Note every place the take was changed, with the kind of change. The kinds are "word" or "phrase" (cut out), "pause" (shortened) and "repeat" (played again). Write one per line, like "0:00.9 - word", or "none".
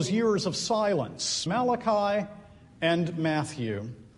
0:01.5 - word